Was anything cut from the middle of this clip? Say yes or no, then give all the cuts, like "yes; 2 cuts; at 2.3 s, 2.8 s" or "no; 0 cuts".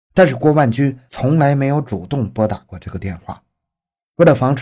no; 0 cuts